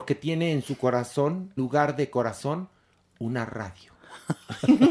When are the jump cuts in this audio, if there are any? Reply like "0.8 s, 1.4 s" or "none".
1.6 s